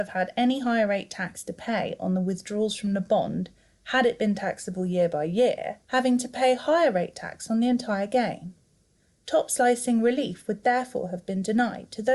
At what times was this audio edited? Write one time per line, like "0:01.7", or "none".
0:05.8